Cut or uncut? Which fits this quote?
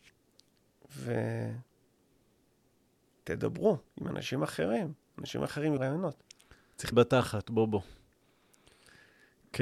cut